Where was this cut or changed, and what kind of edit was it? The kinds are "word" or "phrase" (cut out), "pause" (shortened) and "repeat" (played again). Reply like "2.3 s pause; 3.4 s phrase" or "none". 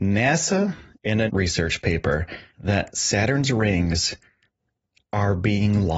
0.9 s phrase; 1.3 s word; 2.5 s pause